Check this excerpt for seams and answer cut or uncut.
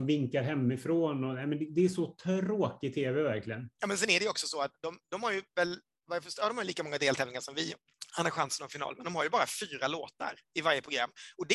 uncut